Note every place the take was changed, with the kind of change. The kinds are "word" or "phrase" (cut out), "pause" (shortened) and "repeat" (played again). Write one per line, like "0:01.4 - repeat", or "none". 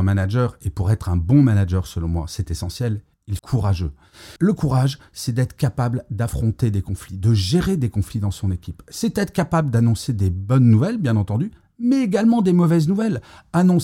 0:03.4 - phrase
0:04.4 - pause